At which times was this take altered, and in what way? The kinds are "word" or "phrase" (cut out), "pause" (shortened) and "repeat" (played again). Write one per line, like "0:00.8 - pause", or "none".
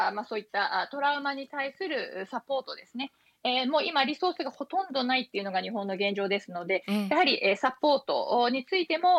none